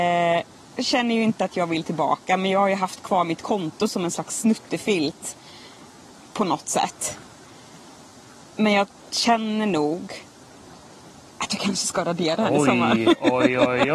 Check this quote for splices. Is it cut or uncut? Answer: uncut